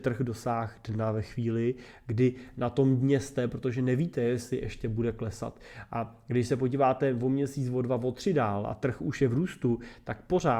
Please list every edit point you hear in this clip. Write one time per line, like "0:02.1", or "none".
none